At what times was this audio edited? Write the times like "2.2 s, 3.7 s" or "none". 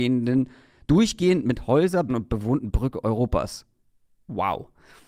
2.1 s